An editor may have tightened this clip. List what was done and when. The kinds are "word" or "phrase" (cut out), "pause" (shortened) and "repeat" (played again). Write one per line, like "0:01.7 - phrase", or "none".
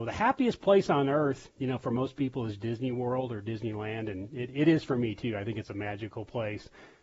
none